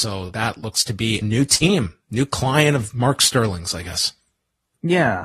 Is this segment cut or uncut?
cut